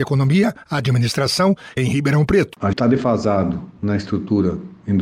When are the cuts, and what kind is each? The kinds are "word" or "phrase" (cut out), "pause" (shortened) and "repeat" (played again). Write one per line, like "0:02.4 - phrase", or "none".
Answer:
0:01.8 - phrase
0:02.7 - word